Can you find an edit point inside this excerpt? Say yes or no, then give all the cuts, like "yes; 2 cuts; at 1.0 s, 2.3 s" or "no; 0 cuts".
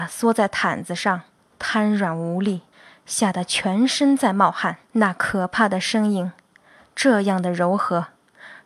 yes; 3 cuts; at 1.4 s, 2.7 s, 4.8 s